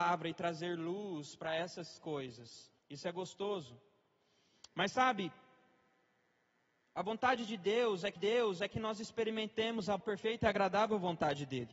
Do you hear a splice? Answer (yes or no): yes